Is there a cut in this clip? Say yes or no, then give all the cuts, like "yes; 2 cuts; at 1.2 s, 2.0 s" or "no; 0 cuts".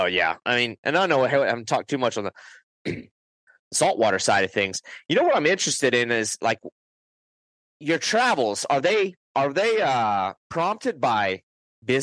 no; 0 cuts